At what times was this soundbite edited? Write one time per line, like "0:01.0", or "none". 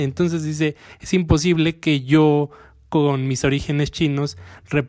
none